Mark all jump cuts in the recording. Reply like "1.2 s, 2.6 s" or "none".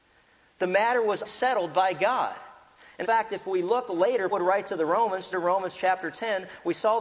1.2 s, 3.0 s, 4.3 s, 5.3 s

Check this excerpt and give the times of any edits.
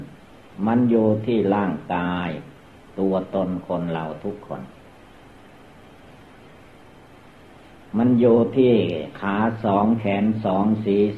none

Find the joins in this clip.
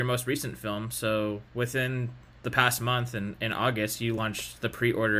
none

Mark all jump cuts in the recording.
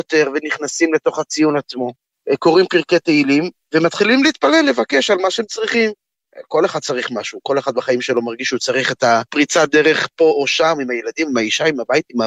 none

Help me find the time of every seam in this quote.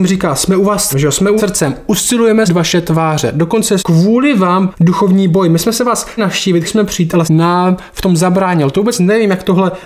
0.9 s, 1.4 s, 2.5 s, 3.8 s, 4.7 s, 6.2 s, 6.7 s, 7.3 s

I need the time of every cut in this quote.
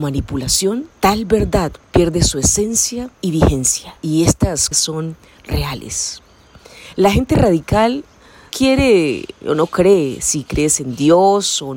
0.9 s, 1.8 s, 3.1 s, 4.0 s, 4.7 s, 8.5 s

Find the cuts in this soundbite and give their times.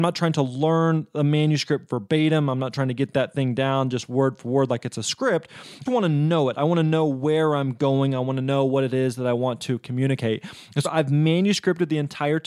5.9 s, 10.8 s

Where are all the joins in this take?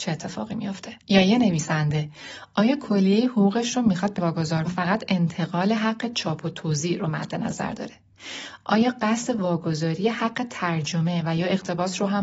1.0 s, 4.2 s, 4.7 s

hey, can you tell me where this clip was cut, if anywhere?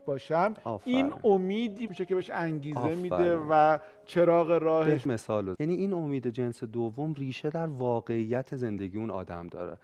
1.9 s, 5.1 s, 5.6 s

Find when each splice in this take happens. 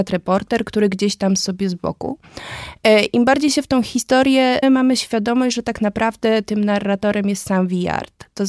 1.4 s, 4.6 s

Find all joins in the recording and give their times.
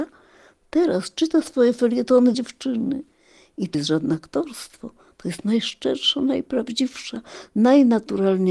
2.3 s, 3.7 s

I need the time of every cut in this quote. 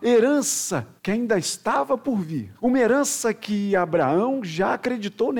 1.0 s, 2.6 s

